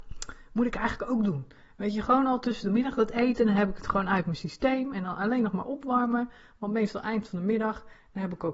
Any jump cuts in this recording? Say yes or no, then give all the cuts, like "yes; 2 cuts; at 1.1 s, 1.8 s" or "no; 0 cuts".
no; 0 cuts